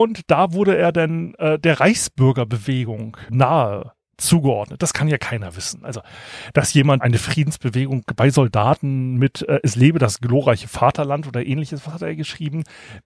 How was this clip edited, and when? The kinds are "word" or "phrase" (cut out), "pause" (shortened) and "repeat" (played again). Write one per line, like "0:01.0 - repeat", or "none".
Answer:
0:03.3 - word
0:07.0 - phrase